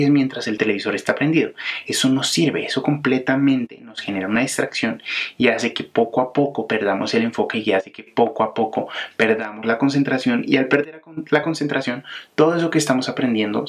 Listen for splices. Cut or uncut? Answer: uncut